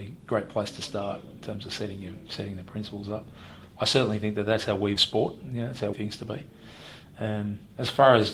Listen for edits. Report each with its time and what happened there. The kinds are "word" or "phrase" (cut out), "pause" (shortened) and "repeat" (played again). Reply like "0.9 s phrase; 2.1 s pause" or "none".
5.0 s phrase; 5.9 s phrase